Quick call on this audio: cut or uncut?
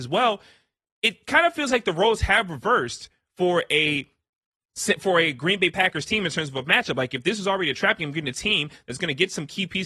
uncut